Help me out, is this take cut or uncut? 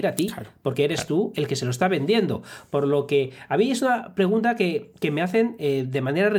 uncut